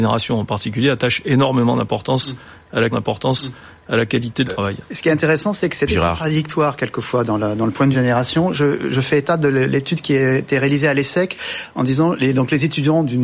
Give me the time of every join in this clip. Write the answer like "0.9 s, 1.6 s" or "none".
2.9 s, 4.4 s, 5.9 s, 7.9 s